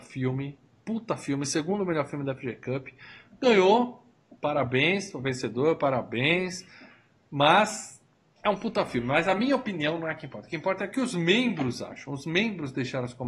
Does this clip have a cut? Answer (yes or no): no